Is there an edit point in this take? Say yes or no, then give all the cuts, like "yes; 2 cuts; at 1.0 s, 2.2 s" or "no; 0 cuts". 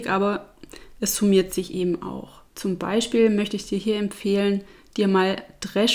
yes; 1 cut; at 2.5 s